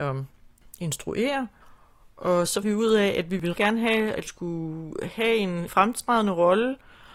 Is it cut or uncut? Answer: cut